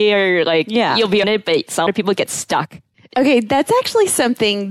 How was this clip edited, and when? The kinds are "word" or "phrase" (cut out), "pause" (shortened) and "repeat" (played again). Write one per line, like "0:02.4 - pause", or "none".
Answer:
0:01.2 - word
0:01.9 - word